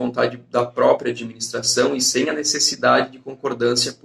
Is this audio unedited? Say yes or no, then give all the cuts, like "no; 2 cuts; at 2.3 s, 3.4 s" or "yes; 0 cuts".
yes; 0 cuts